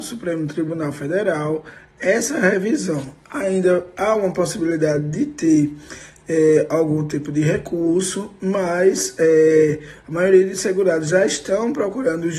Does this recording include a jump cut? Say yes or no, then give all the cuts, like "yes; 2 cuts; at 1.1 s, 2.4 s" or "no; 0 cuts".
no; 0 cuts